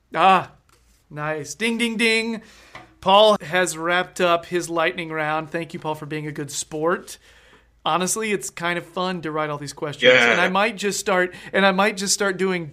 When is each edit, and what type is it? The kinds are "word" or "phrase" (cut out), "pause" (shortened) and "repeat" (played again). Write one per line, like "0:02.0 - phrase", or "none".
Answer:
0:03.4 - word

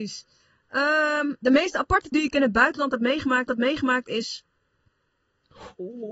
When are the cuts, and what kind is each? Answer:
0:01.4 - word
0:02.1 - word
0:03.5 - repeat

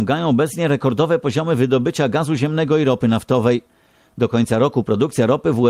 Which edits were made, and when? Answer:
none

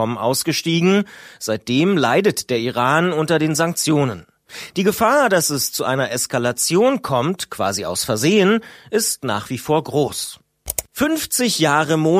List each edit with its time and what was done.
0:10.9 - pause

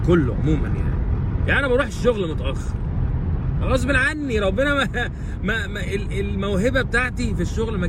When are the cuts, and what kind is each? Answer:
none

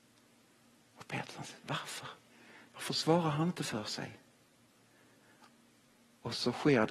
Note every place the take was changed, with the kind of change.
none

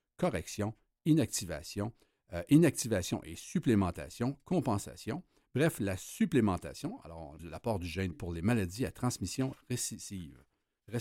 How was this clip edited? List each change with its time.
0:07.4 - word
0:08.1 - phrase

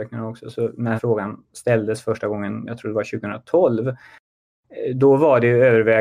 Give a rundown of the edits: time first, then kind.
0:01.0 - word

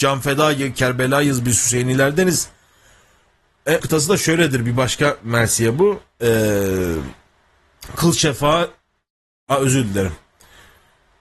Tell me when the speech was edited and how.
0:03.8 - word

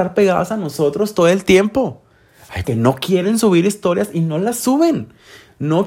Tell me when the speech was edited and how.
0:02.6 - word

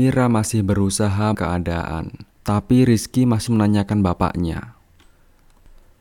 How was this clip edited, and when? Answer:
0:01.3 - word
0:02.3 - pause
0:03.5 - word

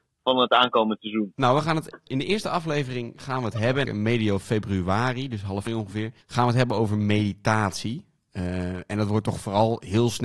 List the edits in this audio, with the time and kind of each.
0:02.1 - word
0:03.9 - phrase
0:05.7 - word
0:06.2 - pause

